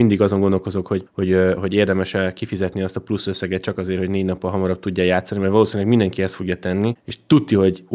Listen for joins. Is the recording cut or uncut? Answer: uncut